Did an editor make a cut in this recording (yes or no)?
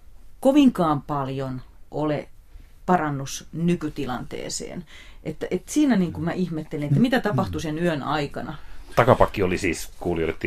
no